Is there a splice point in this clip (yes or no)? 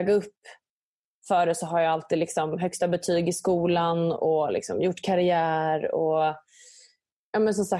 no